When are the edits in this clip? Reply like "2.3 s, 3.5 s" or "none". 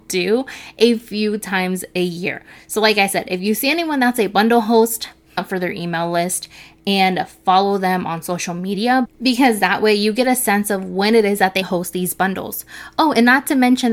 5.4 s, 11.6 s